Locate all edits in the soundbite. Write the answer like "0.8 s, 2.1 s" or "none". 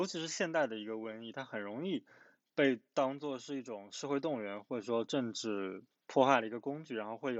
2.9 s